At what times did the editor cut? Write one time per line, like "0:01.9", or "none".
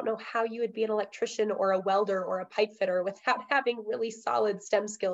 none